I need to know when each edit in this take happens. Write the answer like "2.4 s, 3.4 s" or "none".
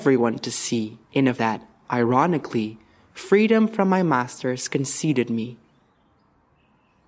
1.0 s, 1.4 s